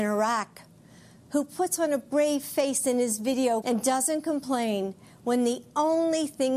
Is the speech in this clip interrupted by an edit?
yes; 1 cut; at 3.6 s

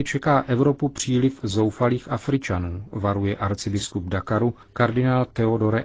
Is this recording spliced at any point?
yes; 1 cut; at 4.6 s

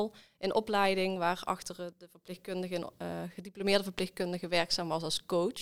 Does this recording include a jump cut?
no; 0 cuts

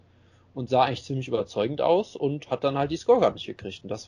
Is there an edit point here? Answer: no; 0 cuts

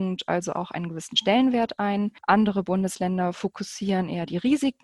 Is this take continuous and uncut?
yes; 0 cuts

